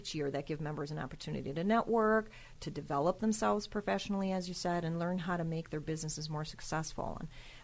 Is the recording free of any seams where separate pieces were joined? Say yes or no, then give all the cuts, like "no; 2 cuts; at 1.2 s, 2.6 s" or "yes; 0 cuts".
yes; 0 cuts